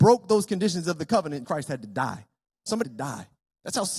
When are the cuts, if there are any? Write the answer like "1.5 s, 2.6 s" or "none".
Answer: 1.4 s, 2.8 s